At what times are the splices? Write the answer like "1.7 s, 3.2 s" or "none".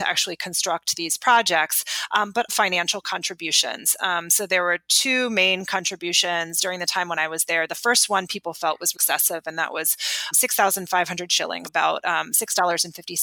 2.5 s, 8.9 s, 10.3 s, 11.6 s